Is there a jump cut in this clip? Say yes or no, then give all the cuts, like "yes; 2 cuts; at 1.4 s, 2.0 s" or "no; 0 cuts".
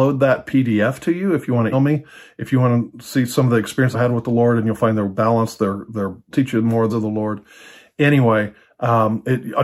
yes; 4 cuts; at 1.7 s, 3.9 s, 6.3 s, 6.9 s